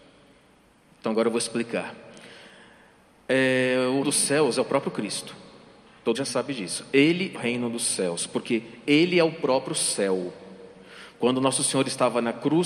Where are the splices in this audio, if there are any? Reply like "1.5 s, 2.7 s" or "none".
4.0 s, 6.1 s, 7.3 s